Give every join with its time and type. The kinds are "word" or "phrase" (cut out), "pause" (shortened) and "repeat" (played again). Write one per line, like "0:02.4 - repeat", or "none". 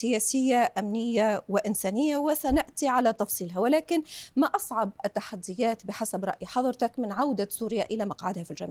none